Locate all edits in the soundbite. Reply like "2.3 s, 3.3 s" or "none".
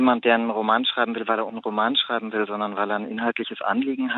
1.5 s